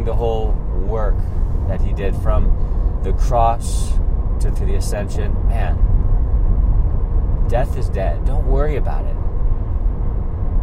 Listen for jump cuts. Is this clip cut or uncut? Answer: cut